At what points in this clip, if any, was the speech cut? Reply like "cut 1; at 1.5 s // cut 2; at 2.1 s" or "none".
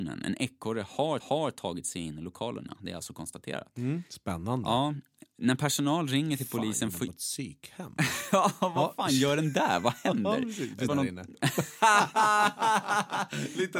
cut 1; at 1.2 s // cut 2; at 4.1 s // cut 3; at 6.9 s // cut 4; at 10.9 s